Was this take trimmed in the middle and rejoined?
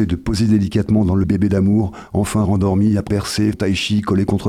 yes; 3 cuts; at 1.2 s, 3.1 s, 3.5 s

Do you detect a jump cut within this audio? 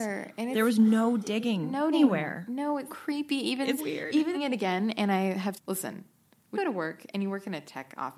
yes; 6 cuts; at 1.9 s, 2.9 s, 3.8 s, 4.3 s, 5.5 s, 6.5 s

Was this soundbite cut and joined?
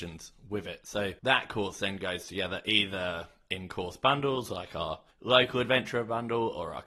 yes; 2 cuts; at 1.2 s, 5.1 s

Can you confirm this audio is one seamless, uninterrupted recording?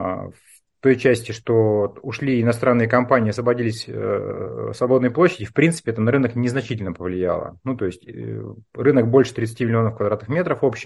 yes; 0 cuts

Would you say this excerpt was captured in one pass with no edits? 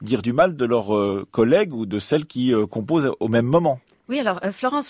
yes; 0 cuts

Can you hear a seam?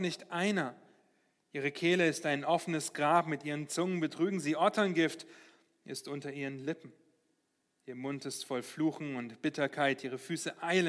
no; 0 cuts

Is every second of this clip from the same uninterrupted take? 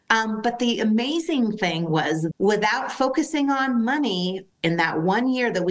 no; 2 cuts; at 2.3 s, 4.5 s

